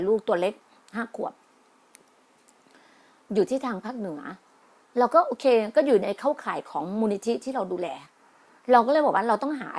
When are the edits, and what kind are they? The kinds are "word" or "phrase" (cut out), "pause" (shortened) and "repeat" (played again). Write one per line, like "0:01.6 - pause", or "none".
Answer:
none